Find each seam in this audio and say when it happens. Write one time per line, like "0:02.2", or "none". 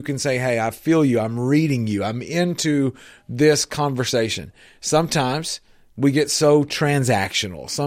none